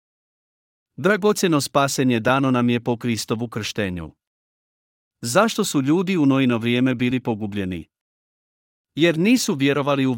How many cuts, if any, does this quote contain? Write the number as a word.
zero